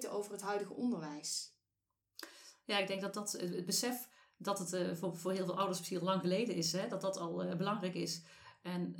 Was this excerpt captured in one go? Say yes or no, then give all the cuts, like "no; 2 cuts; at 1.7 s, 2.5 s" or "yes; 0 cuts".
yes; 0 cuts